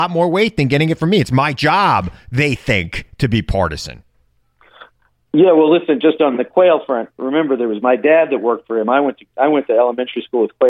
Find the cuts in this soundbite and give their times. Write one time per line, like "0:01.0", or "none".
none